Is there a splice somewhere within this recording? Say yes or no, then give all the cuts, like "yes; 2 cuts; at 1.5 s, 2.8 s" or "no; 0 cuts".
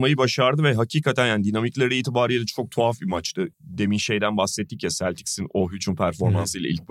yes; 1 cut; at 3.5 s